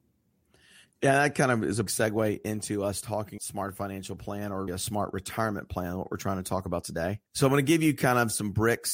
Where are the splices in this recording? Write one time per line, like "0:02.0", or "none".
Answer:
0:01.9
0:03.4
0:04.7
0:07.3